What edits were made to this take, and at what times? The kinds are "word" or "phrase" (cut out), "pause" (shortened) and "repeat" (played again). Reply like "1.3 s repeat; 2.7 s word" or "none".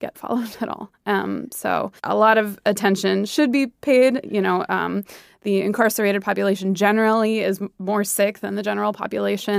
none